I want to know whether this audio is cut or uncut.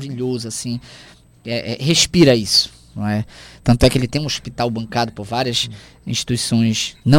uncut